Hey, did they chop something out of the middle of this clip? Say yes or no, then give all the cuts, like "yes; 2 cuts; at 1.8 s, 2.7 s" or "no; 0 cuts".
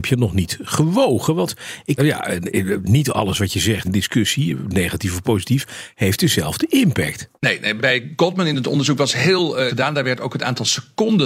yes; 5 cuts; at 2.0 s, 3.8 s, 7.4 s, 7.8 s, 9.7 s